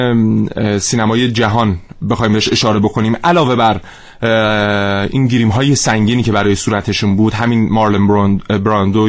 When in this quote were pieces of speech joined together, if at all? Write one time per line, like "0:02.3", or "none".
none